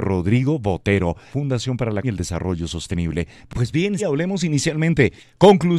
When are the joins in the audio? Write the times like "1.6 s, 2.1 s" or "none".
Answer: 1.3 s, 2.0 s, 4.0 s